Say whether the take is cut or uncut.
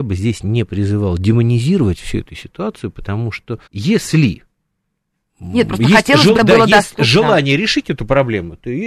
cut